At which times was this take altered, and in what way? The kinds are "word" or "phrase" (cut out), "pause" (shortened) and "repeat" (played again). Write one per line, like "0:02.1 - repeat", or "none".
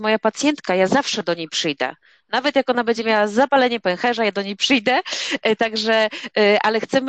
none